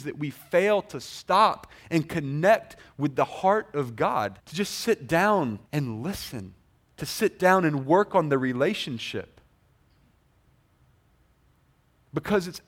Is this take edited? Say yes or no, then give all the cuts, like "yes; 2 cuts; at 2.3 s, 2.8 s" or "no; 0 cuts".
yes; 3 cuts; at 4.4 s, 5.7 s, 6.8 s